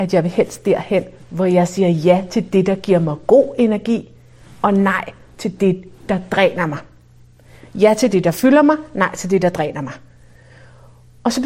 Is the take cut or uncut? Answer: uncut